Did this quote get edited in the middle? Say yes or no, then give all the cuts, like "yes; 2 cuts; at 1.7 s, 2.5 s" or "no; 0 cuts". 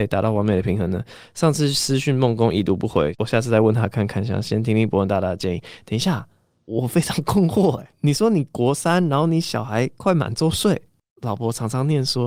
no; 0 cuts